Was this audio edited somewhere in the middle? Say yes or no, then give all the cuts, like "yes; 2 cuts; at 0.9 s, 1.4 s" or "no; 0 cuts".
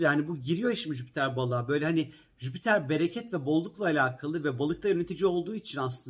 no; 0 cuts